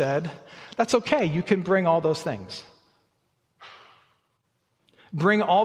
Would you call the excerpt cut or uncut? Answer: uncut